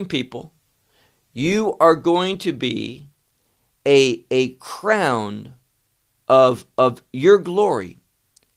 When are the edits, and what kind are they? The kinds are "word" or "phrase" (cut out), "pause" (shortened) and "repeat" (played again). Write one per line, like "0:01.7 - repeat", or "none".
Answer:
none